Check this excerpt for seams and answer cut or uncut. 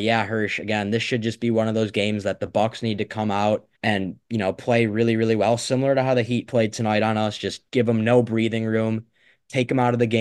cut